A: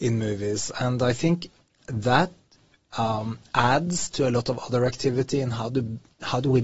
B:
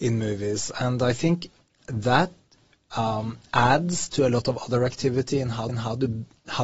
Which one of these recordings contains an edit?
B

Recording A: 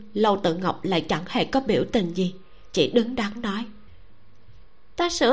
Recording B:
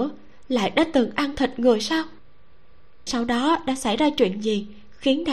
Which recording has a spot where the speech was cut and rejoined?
B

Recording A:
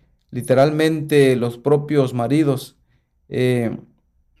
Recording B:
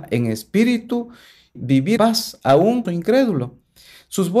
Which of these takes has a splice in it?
B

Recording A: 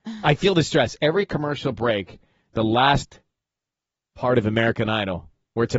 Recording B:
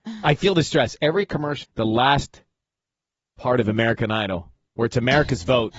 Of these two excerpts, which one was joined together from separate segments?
B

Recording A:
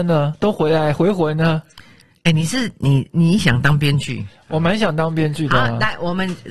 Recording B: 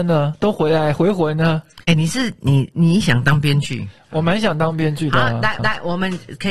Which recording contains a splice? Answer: B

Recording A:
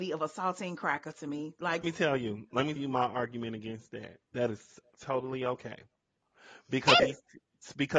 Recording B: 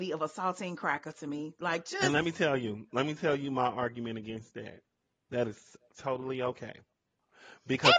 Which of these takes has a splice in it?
A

